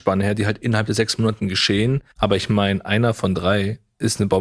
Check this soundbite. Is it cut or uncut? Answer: cut